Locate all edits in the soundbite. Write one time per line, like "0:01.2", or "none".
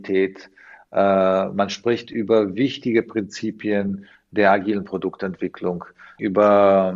none